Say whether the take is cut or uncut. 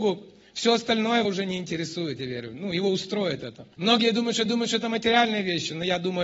cut